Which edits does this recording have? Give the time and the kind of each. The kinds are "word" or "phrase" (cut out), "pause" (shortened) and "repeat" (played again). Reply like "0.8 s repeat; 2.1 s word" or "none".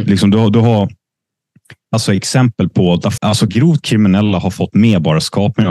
1.9 s word; 3.2 s word; 3.5 s word